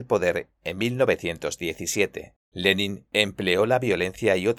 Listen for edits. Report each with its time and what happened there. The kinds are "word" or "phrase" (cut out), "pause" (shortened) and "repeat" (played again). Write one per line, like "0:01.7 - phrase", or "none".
0:02.4 - pause